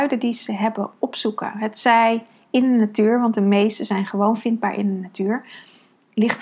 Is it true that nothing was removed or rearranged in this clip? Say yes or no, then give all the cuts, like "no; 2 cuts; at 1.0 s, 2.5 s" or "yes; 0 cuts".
yes; 0 cuts